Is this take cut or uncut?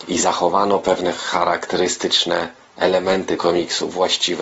cut